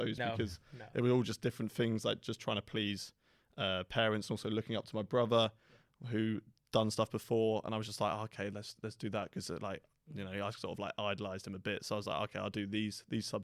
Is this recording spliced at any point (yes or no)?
no